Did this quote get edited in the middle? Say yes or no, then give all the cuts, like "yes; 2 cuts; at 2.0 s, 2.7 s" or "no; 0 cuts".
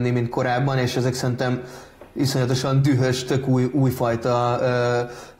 no; 0 cuts